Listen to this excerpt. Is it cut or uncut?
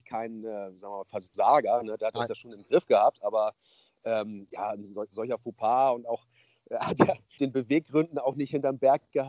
cut